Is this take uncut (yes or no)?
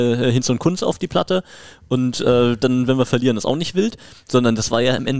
yes